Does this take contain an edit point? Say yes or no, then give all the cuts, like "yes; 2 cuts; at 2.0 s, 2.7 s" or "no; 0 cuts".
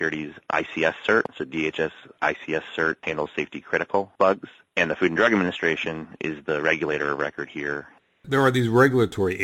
no; 0 cuts